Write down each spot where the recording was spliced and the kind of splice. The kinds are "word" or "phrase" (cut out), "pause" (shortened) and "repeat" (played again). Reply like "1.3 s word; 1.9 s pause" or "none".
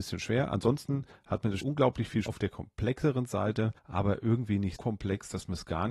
1.6 s word; 2.3 s phrase; 3.8 s pause; 4.8 s word